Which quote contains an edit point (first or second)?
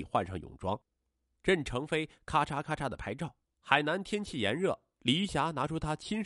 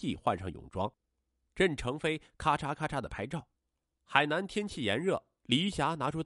first